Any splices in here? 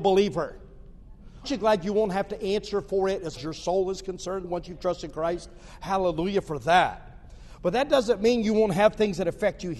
yes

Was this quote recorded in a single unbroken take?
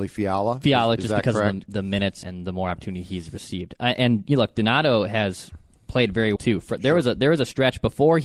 no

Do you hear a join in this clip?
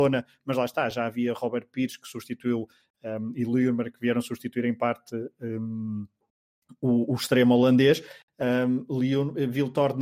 no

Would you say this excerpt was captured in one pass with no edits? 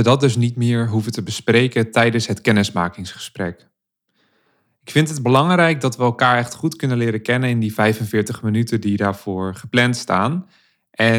yes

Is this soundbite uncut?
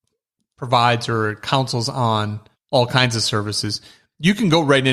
no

